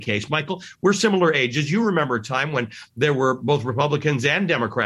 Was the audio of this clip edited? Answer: no; 0 cuts

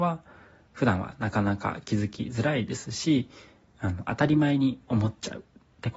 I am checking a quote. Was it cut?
no; 0 cuts

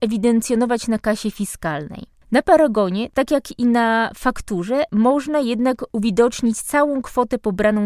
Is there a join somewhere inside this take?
no; 0 cuts

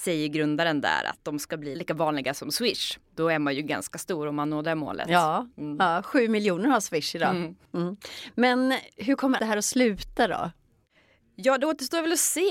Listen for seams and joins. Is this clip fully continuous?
no; 2 cuts; at 1.7 s, 9.4 s

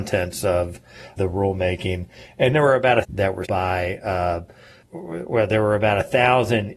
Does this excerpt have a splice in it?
yes; 5 cuts; at 1.2 s, 2.5 s, 3.0 s, 3.5 s, 4.8 s

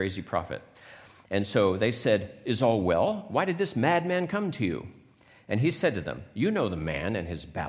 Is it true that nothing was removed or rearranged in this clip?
yes; 0 cuts

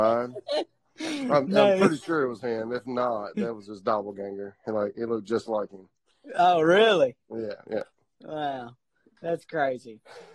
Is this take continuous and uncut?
yes; 0 cuts

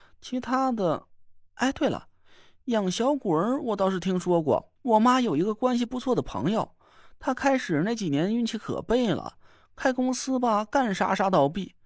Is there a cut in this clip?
yes; 2 cuts; at 1.5 s, 4.8 s

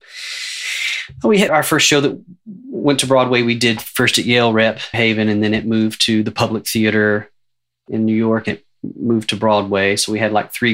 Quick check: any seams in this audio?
yes; 3 cuts; at 1.5 s, 4.9 s, 8.5 s

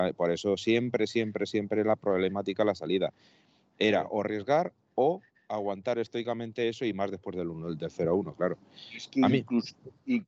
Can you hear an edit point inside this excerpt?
no; 0 cuts

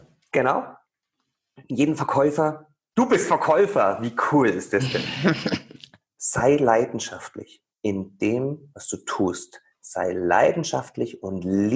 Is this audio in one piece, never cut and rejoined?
yes; 0 cuts

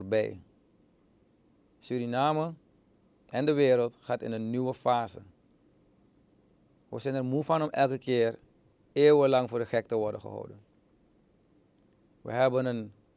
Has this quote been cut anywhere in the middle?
no; 0 cuts

